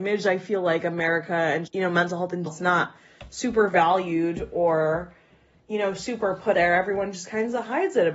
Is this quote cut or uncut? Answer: cut